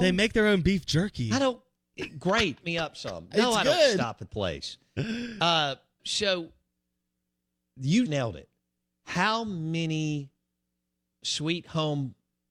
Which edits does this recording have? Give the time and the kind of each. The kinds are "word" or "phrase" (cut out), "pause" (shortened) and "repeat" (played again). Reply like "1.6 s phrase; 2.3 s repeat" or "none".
2.6 s word; 4.3 s word; 6.0 s word; 8.1 s word; 11.2 s word